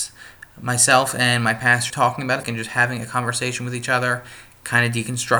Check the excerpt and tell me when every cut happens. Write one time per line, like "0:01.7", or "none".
0:01.9
0:02.4

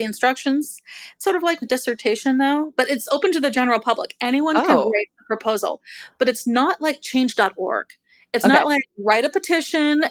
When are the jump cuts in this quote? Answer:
0:01.6

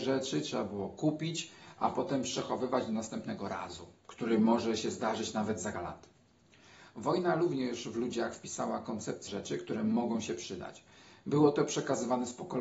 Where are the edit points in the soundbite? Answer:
0:04.0
0:05.7
0:09.3

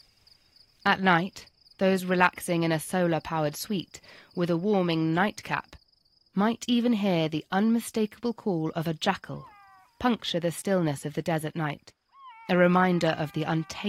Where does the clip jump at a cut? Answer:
none

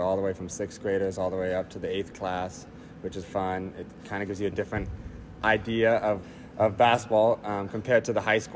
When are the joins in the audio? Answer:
0:02.1
0:03.2
0:06.2

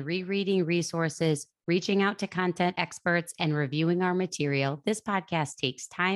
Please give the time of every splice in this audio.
none

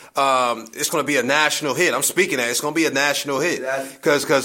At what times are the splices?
none

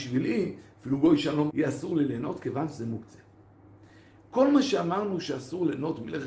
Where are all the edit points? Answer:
0:01.5

